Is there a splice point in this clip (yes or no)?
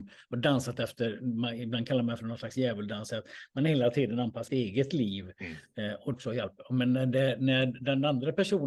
yes